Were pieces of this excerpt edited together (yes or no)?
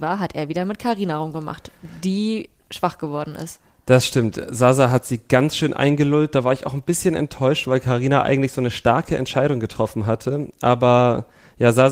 no